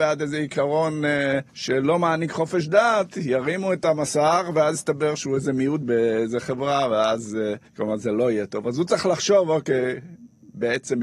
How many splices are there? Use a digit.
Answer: 3